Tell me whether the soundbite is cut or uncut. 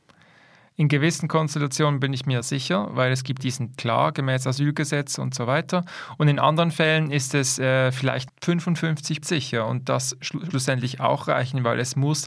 cut